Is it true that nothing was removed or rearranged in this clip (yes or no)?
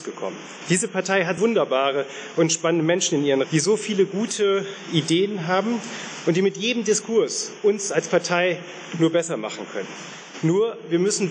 no